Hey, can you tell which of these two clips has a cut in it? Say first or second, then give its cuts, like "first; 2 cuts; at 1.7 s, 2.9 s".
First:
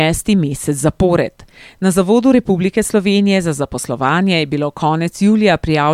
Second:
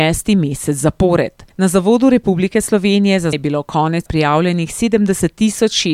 second; 3 cuts; at 1.5 s, 3.3 s, 4.1 s